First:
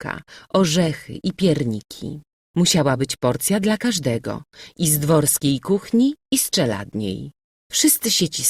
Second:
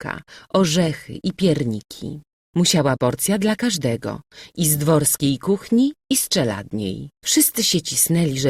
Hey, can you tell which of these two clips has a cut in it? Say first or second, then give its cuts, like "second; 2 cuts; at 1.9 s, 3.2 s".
second; 2 cuts; at 3.0 s, 7.1 s